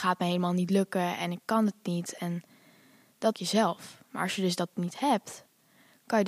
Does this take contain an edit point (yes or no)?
yes